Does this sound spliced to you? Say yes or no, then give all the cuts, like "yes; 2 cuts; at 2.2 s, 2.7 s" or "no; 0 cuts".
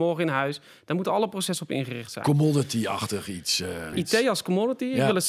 yes; 1 cut; at 3.9 s